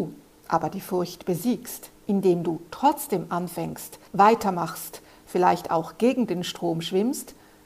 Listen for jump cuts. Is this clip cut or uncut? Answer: cut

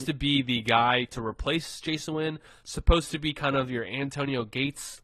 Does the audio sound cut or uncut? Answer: uncut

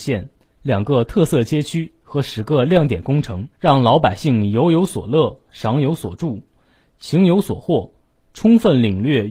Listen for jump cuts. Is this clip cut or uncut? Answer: cut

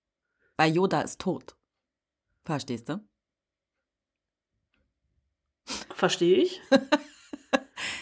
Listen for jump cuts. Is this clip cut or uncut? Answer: cut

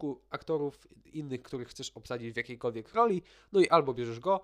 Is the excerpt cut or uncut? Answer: uncut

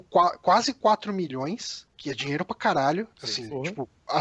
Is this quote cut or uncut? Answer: uncut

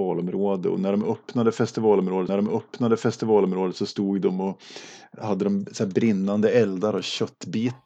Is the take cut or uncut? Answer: cut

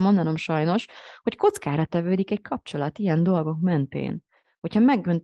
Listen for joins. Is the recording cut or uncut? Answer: uncut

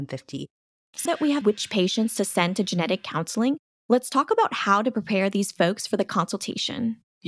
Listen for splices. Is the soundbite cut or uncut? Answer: cut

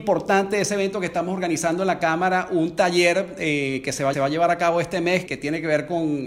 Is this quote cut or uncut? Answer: cut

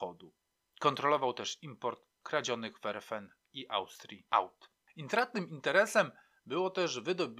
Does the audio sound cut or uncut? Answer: uncut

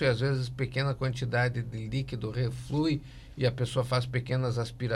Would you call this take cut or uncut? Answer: uncut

